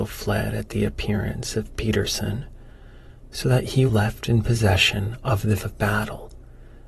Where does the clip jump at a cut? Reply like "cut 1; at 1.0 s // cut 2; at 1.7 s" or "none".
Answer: cut 1; at 3.9 s // cut 2; at 5.6 s